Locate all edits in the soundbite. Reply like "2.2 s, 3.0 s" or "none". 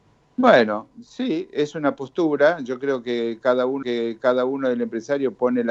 3.8 s